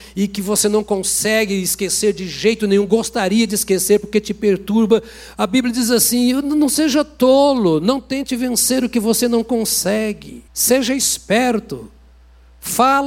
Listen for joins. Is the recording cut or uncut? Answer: cut